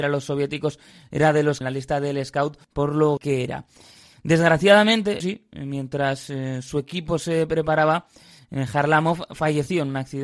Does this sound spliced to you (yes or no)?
yes